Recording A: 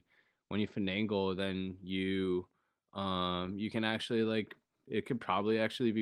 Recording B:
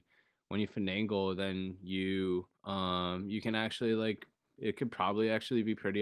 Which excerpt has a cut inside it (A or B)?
B